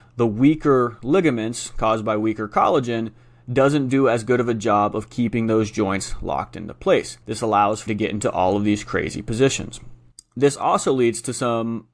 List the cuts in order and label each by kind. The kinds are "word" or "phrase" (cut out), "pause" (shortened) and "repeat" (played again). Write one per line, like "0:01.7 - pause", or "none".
0:07.2 - pause
0:07.9 - word
0:10.1 - pause